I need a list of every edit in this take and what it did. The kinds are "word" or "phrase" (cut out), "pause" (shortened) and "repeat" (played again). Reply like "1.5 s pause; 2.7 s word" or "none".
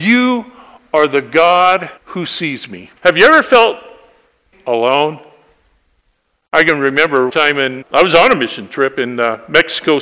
2.0 s pause; 3.0 s pause; 4.5 s word; 7.3 s word; 7.8 s word